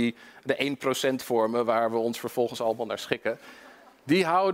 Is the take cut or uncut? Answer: uncut